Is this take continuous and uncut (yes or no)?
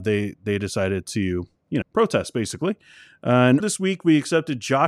no